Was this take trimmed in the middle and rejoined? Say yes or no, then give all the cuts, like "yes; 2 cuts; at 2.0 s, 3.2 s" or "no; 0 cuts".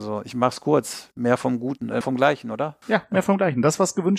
yes; 1 cut; at 2.0 s